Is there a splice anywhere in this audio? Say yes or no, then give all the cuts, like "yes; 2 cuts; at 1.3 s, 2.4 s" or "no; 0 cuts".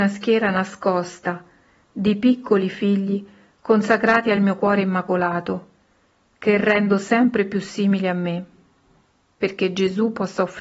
no; 0 cuts